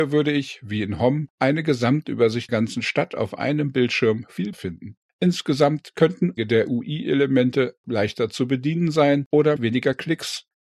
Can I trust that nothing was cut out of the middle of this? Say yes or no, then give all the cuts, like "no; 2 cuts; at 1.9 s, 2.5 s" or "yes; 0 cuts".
no; 5 cuts; at 2.5 s, 4.5 s, 6.4 s, 7.8 s, 9.6 s